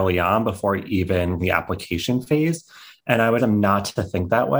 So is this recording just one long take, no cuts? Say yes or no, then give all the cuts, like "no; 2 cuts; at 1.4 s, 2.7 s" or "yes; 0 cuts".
no; 2 cuts; at 1.4 s, 3.4 s